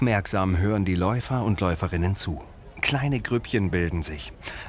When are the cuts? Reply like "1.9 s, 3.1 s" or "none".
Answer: none